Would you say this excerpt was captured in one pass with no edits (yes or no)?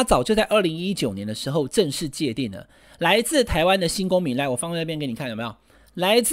yes